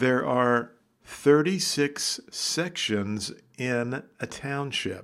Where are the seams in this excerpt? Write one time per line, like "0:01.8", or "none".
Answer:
none